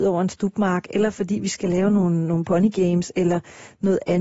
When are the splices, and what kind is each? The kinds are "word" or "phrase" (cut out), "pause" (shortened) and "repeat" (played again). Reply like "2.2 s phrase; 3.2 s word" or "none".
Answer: none